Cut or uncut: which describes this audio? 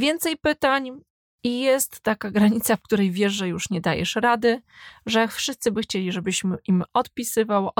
uncut